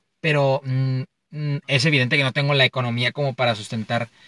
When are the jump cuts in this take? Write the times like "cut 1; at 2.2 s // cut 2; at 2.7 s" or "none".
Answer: none